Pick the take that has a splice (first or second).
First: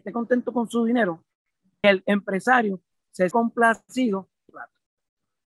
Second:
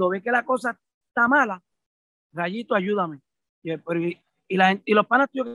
first